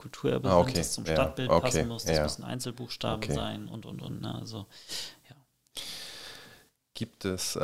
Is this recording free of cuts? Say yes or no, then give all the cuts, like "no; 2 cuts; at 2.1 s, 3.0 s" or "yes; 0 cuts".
yes; 0 cuts